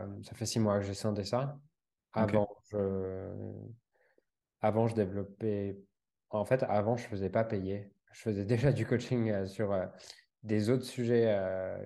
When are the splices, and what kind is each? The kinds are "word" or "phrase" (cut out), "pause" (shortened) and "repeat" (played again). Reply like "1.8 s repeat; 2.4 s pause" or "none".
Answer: none